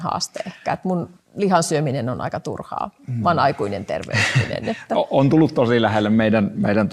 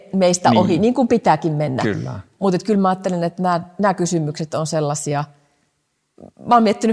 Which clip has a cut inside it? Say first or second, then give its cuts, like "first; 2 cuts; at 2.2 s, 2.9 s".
first; 1 cut; at 1.2 s